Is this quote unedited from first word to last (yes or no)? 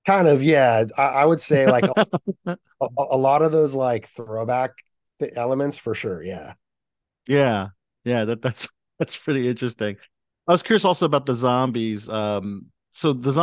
yes